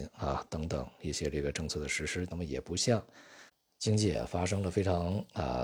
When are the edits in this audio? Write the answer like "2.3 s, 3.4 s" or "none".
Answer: none